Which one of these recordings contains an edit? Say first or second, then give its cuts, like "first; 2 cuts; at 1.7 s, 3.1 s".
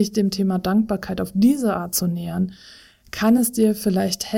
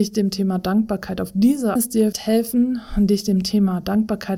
second; 2 cuts; at 1.8 s, 2.1 s